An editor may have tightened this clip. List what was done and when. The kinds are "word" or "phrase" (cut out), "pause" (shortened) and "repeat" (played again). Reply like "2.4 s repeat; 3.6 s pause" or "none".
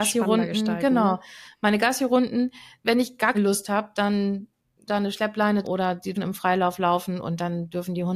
2.8 s word; 3.3 s word; 4.9 s word; 5.6 s word; 6.2 s word